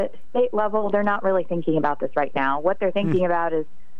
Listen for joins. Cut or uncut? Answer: uncut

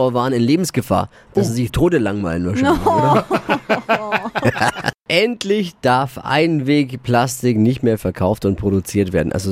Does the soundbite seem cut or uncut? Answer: cut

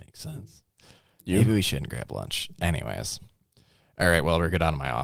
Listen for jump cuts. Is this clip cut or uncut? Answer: uncut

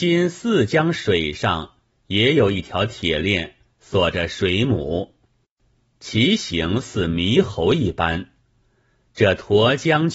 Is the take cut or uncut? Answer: uncut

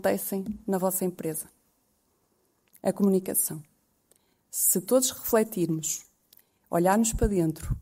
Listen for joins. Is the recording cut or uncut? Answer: uncut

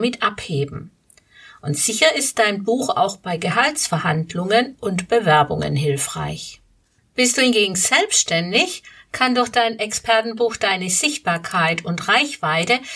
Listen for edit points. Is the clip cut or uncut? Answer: uncut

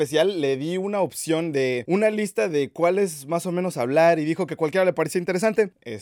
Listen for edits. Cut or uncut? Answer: uncut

